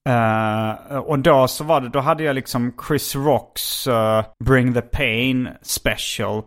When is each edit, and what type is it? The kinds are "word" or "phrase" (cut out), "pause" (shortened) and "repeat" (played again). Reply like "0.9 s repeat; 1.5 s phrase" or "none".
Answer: 4.3 s pause

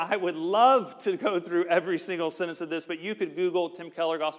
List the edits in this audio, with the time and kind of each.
none

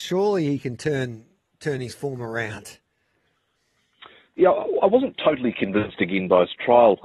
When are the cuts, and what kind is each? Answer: none

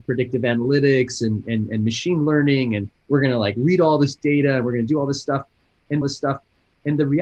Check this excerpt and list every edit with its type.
6.0 s repeat

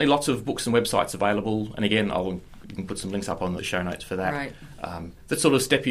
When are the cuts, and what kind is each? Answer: 2.6 s word; 3.6 s word

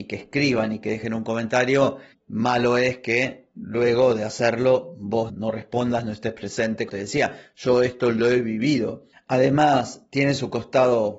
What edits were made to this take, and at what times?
2.1 s pause; 5.3 s word; 6.9 s word; 9.1 s pause

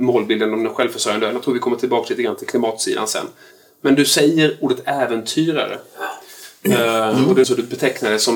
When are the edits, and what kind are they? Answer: 7.4 s word

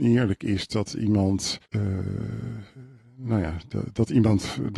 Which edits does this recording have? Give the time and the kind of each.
1.6 s pause

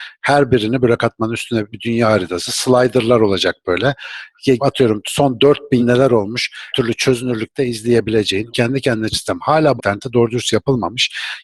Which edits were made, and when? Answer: 1.0 s word; 1.7 s word; 4.6 s word; 5.8 s word; 6.7 s word; 8.5 s word; 9.1 s word; 9.8 s word

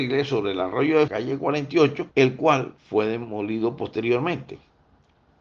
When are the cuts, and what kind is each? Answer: 1.1 s phrase; 2.1 s pause; 2.8 s pause

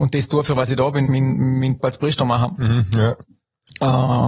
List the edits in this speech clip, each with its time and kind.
1.1 s word; 1.8 s word

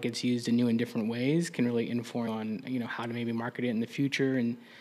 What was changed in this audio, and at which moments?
2.3 s word

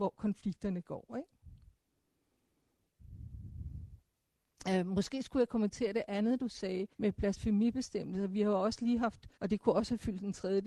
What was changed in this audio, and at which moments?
6.9 s pause; 9.3 s pause

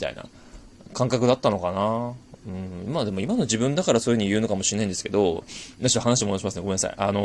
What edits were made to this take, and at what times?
none

